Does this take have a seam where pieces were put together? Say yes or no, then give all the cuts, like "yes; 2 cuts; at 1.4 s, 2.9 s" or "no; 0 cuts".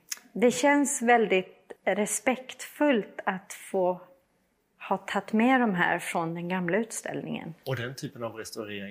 yes; 1 cut; at 1.8 s